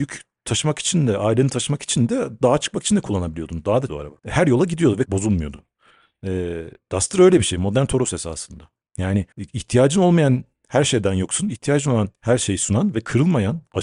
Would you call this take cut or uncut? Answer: cut